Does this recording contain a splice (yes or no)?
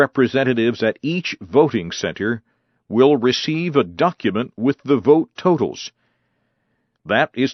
no